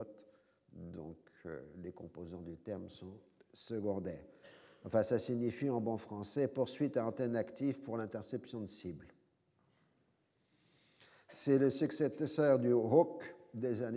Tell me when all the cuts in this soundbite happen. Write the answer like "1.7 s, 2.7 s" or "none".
none